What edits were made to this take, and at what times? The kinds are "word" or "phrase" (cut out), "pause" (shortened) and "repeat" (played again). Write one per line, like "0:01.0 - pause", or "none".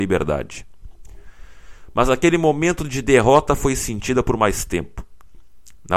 none